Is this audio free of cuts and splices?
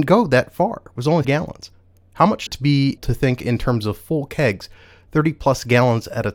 no; 3 cuts; at 1.2 s, 2.5 s, 3.0 s

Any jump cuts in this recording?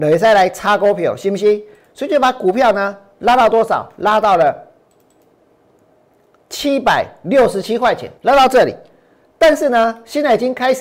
yes; 1 cut; at 8.2 s

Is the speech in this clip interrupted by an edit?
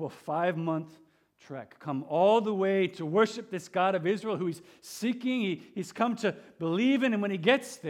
no; 0 cuts

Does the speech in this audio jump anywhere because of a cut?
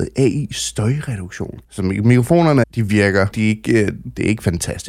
yes; 3 cuts; at 1.6 s, 2.6 s, 3.3 s

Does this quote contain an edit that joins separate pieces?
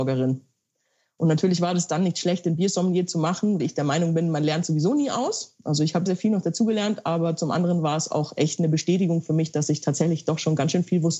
yes; 2 cuts; at 3.6 s, 6.1 s

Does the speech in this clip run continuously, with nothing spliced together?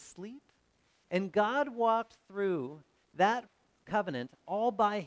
yes; 0 cuts

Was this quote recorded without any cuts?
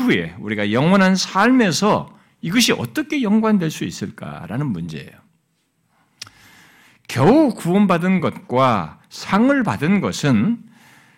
yes; 0 cuts

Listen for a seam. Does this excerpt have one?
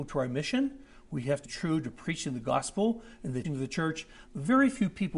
yes; 3 cuts; at 1.4 s, 3.4 s, 4.3 s

